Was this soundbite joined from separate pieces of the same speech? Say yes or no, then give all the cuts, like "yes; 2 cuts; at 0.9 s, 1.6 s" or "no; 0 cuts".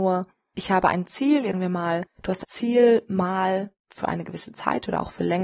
yes; 3 cuts; at 1.5 s, 2.4 s, 3.8 s